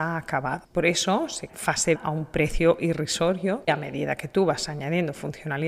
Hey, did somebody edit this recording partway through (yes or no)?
yes